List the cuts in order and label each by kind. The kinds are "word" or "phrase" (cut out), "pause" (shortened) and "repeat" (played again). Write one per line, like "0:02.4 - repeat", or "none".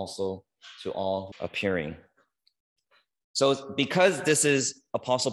0:01.3 - phrase